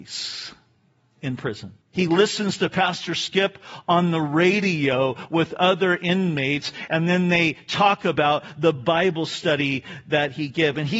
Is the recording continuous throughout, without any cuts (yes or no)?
no